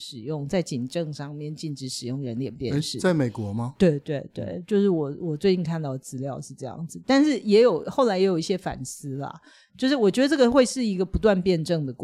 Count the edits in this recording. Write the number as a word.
zero